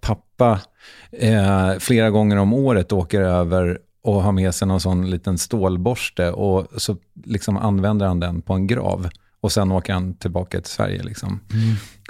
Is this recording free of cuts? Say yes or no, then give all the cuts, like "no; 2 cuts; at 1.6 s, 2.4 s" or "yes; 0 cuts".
yes; 0 cuts